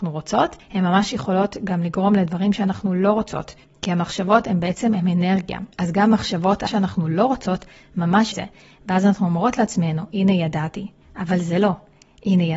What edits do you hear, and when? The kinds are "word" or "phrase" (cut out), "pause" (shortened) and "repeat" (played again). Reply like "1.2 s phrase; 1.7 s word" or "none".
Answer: 5.7 s pause; 6.7 s word; 8.3 s phrase